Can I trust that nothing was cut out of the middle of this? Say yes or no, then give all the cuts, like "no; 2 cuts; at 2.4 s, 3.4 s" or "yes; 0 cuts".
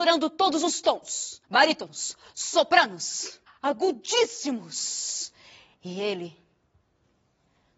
no; 2 cuts; at 1.4 s, 3.5 s